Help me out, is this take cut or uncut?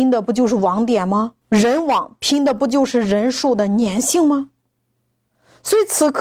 cut